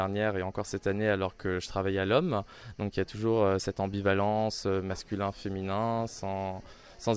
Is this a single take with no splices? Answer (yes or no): yes